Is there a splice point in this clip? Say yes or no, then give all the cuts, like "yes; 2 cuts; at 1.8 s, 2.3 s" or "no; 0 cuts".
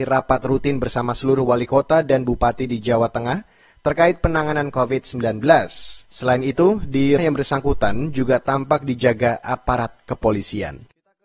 yes; 2 cuts; at 6.0 s, 7.2 s